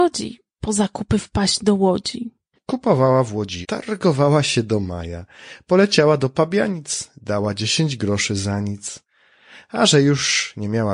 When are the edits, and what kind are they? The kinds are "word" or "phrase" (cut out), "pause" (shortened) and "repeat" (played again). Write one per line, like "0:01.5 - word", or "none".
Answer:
0:03.6 - word